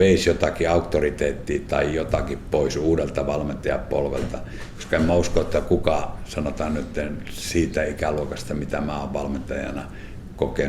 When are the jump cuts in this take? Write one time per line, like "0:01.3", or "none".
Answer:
none